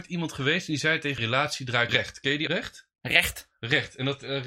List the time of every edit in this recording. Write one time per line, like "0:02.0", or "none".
0:01.2
0:01.9
0:02.5